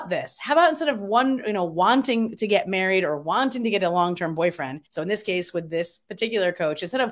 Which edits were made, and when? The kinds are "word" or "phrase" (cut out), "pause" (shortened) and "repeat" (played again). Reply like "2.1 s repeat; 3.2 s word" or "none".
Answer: 4.9 s pause